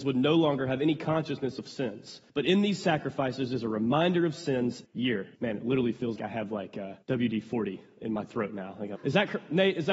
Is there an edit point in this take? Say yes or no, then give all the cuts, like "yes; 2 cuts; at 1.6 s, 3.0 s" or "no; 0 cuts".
yes; 6 cuts; at 2.3 s, 4.8 s, 5.4 s, 6.2 s, 7.0 s, 9.0 s